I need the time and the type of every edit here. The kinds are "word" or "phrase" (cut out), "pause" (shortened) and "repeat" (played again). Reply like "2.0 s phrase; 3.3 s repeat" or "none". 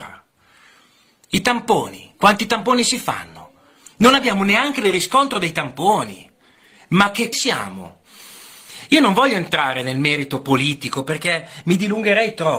7.3 s phrase